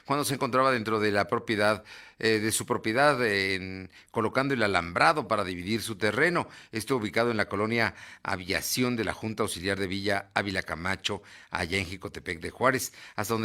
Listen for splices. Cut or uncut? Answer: uncut